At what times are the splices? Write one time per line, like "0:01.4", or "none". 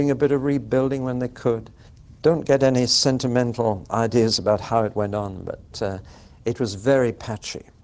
0:01.9